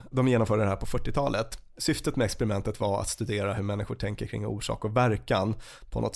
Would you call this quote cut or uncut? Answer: uncut